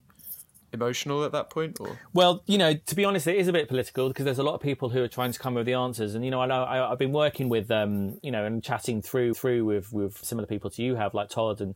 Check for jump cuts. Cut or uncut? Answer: cut